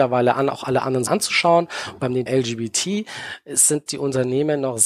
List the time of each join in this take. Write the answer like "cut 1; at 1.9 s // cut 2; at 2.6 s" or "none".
cut 1; at 1.1 s // cut 2; at 2.3 s // cut 3; at 3.9 s

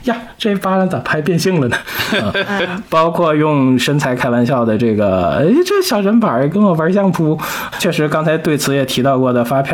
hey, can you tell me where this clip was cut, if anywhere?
cut 1; at 2.9 s // cut 2; at 7.7 s

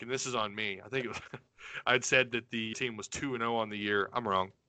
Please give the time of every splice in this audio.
cut 1; at 2.7 s

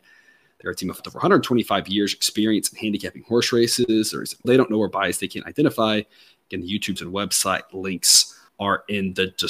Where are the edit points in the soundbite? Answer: cut 1; at 1.0 s // cut 2; at 4.4 s // cut 3; at 7.0 s // cut 4; at 8.5 s

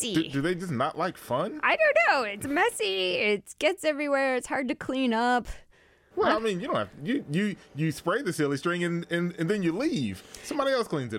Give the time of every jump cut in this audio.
none

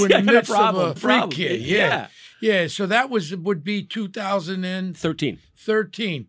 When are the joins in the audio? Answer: cut 1; at 1.0 s

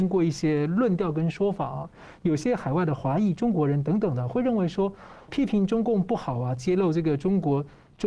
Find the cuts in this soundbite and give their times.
cut 1; at 5.3 s

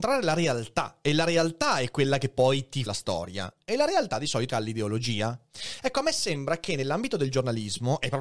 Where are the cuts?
cut 1; at 2.9 s // cut 2; at 4.5 s

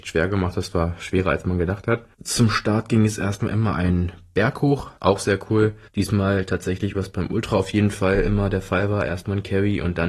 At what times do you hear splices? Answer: cut 1; at 2.1 s // cut 2; at 5.0 s // cut 3; at 5.9 s // cut 4; at 6.9 s

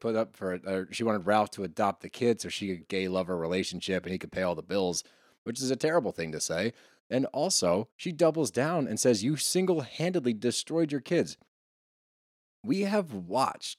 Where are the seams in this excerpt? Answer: cut 1; at 2.8 s // cut 2; at 7.9 s

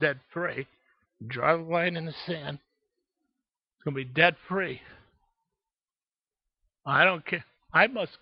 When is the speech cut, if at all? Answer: none

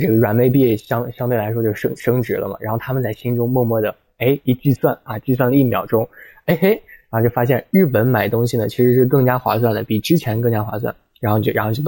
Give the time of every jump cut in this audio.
none

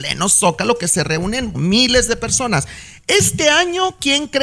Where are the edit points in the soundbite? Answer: cut 1; at 1.5 s

